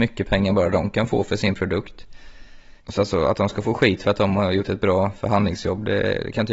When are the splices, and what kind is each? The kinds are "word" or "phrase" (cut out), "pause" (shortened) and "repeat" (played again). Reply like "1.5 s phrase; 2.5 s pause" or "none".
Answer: 2.8 s pause